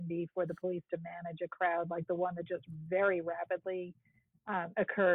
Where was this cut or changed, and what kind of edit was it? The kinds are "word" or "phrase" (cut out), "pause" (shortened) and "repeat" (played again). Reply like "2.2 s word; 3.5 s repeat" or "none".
none